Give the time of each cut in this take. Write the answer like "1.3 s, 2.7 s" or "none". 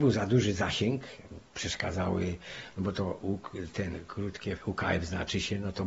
4.6 s